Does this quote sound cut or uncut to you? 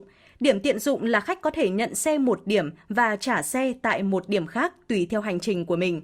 uncut